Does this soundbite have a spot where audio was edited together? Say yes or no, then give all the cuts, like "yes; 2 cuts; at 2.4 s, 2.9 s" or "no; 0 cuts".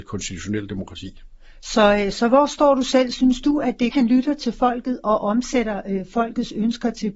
yes; 2 cuts; at 2.1 s, 3.9 s